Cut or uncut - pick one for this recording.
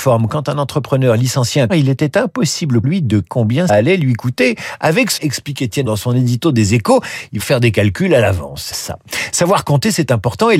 cut